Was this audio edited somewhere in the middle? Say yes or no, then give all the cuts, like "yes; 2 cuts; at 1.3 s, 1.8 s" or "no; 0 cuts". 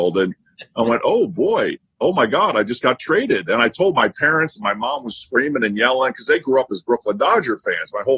no; 0 cuts